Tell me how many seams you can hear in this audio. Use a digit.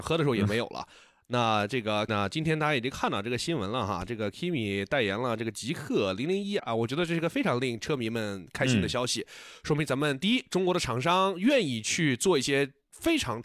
2